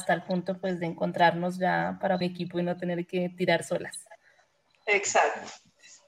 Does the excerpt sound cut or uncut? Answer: cut